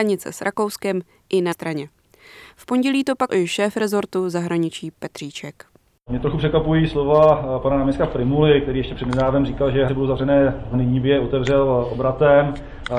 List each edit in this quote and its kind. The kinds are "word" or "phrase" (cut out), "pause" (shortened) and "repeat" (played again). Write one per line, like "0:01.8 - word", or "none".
0:01.5 - word
0:03.3 - word
0:09.9 - word
0:10.7 - word